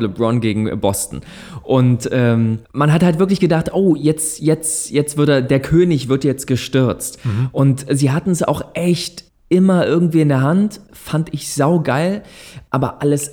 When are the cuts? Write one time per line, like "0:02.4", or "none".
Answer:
0:02.6